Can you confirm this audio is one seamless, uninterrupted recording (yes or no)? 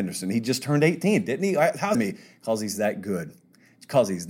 no